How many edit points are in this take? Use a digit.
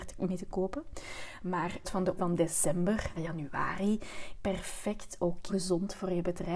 5